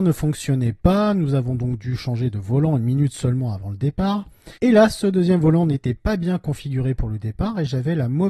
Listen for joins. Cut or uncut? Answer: cut